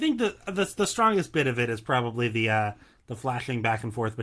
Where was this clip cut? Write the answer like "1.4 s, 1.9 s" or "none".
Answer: none